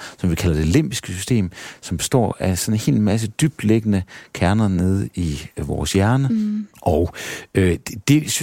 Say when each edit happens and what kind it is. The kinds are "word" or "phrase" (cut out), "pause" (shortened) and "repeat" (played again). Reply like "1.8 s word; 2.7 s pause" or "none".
6.7 s pause